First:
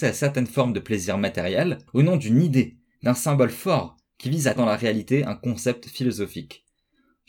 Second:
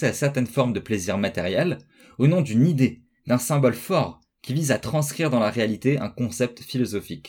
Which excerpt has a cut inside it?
first; 2 cuts; at 1.9 s, 4.6 s

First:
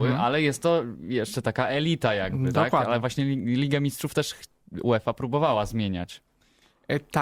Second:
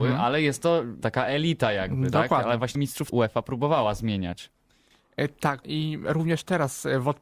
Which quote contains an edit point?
second; 4 cuts; at 1.0 s, 2.7 s, 3.1 s, 5.6 s

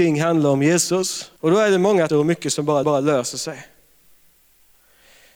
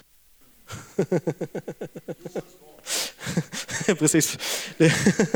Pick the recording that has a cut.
first; 3 cuts; at 1.4 s, 2.1 s, 2.8 s

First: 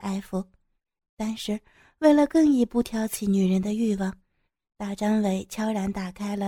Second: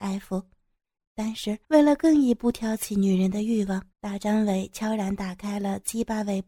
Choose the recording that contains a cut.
second; 2 cuts; at 1.6 s, 3.9 s

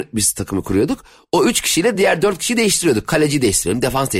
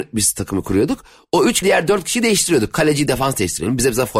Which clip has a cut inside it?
second; 2 cuts; at 1.6 s, 3.1 s

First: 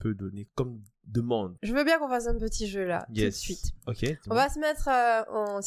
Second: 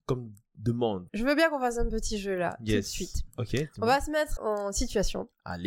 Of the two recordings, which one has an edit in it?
second; 1 cut; at 4.4 s

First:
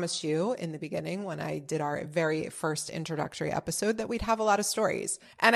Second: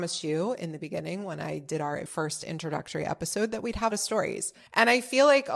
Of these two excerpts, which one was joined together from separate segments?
second; 2 cuts; at 2.1 s, 3.9 s

